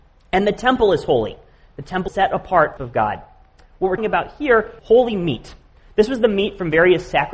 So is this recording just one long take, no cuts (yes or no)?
no